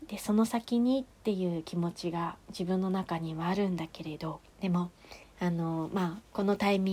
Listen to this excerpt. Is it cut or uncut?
cut